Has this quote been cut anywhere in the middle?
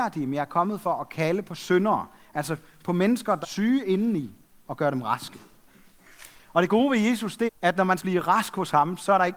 yes; 3 cuts; at 3.4 s, 7.5 s, 8.0 s

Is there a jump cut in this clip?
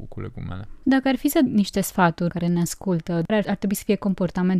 yes; 3 cuts; at 1.5 s, 2.3 s, 3.3 s

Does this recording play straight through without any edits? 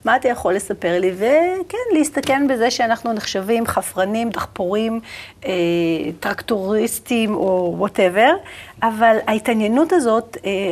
yes; 0 cuts

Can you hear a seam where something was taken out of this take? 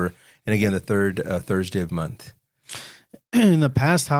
yes; 1 cut; at 1.9 s

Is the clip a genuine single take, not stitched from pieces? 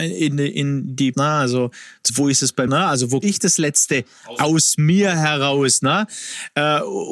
no; 4 cuts; at 1.1 s, 2.1 s, 2.7 s, 3.2 s

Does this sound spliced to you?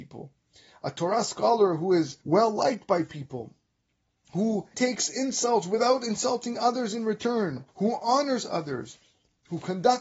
yes; 3 cuts; at 2.2 s, 4.7 s, 7.7 s

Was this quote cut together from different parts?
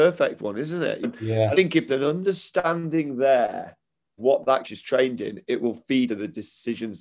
yes; 6 cuts; at 1.0 s, 1.5 s, 1.9 s, 4.2 s, 4.6 s, 6.1 s

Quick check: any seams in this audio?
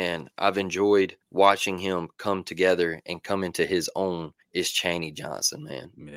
yes; 2 cuts; at 1.2 s, 4.4 s

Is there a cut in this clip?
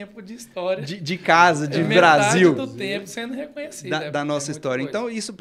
no; 0 cuts

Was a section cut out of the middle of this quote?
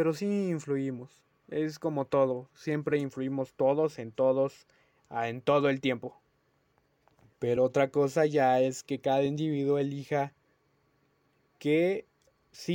no; 0 cuts

